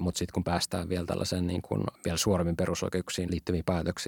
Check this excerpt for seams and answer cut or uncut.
uncut